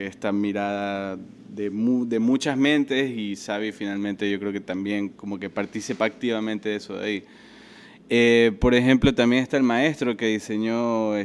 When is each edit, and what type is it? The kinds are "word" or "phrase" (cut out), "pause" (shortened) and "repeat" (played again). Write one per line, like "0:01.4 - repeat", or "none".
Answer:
0:05.2 - pause